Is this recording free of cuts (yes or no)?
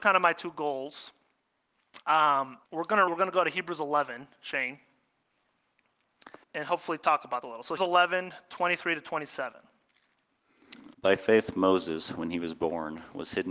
no